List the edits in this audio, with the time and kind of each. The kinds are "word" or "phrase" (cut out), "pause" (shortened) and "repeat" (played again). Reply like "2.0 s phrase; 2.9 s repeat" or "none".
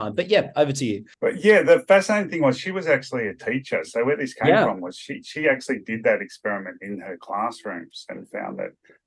1.1 s pause